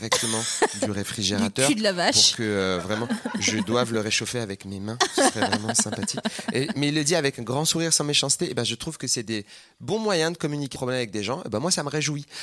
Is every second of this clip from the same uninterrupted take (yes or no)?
no